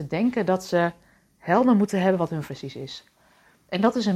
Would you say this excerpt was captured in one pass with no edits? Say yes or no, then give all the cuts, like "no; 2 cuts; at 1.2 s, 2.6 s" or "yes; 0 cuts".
no; 1 cut; at 2.5 s